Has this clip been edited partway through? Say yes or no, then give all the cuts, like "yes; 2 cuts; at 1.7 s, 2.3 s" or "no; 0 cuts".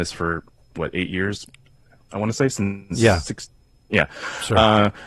no; 0 cuts